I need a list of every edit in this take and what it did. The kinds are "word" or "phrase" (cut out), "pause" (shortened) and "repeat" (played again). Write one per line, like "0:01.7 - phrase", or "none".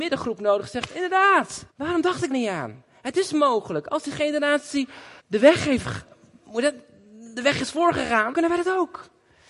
0:01.7 - pause
0:02.3 - word
0:05.2 - pause
0:08.3 - word